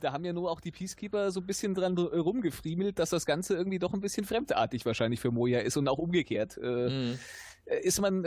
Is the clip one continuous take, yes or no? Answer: yes